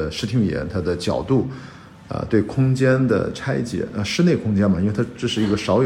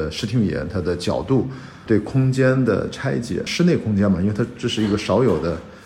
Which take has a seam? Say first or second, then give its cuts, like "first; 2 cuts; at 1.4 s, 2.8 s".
second; 2 cuts; at 1.9 s, 3.5 s